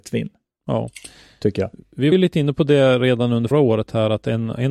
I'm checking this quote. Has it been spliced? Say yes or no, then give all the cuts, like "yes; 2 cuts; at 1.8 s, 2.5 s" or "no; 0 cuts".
yes; 2 cuts; at 2.1 s, 3.5 s